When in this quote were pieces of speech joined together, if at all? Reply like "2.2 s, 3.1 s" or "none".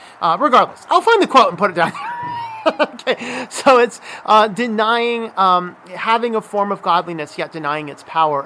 none